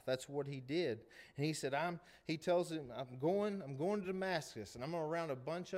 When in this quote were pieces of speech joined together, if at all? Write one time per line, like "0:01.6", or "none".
none